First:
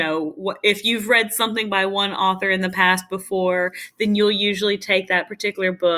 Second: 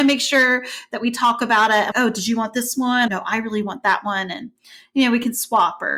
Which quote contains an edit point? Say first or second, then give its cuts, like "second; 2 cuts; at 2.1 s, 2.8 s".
second; 2 cuts; at 1.9 s, 3.1 s